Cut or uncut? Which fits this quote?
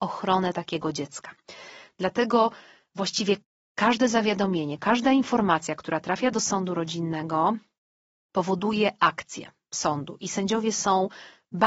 uncut